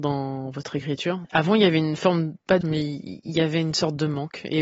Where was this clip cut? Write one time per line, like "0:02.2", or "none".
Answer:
0:02.6